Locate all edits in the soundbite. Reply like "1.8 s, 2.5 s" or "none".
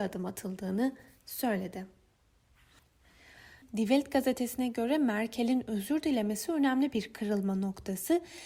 none

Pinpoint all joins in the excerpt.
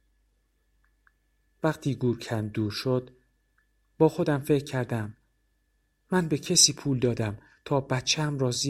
none

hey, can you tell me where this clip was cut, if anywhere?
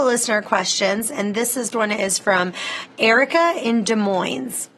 1.7 s

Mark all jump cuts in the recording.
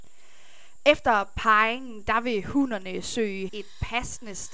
3.5 s

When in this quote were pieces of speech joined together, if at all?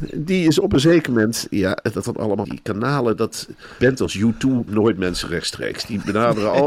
2.0 s, 2.4 s, 3.8 s, 4.7 s

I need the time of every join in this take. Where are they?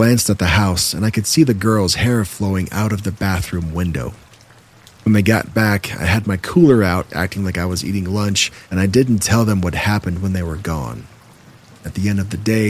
8.6 s

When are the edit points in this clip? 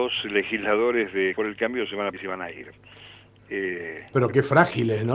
1.3 s, 2.1 s, 4.1 s

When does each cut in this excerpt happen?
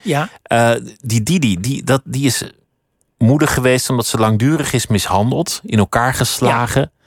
none

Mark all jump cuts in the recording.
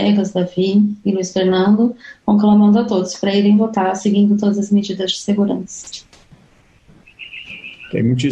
none

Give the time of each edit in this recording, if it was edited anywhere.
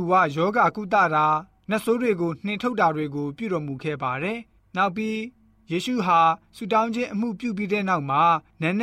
4.5 s

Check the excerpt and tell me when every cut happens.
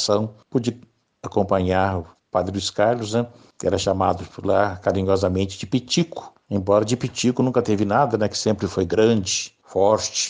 none

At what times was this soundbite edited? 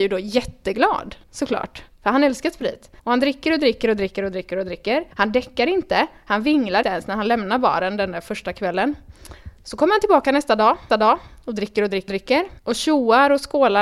1.2 s, 3.0 s, 5.1 s, 6.8 s, 10.9 s, 12.1 s, 12.6 s

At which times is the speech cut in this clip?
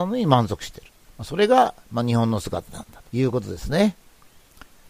1.0 s, 3.1 s

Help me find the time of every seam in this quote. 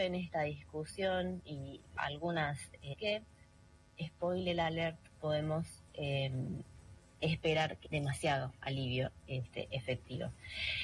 2.0 s, 2.9 s, 5.2 s, 7.8 s

